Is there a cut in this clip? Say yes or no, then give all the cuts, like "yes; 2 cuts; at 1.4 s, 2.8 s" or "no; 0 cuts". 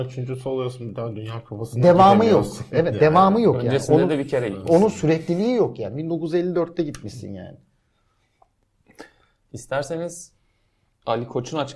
no; 0 cuts